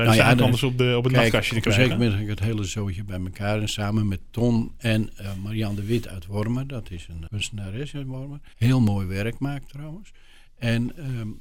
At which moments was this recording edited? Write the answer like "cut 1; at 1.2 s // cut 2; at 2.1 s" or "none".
cut 1; at 7.3 s // cut 2; at 8.5 s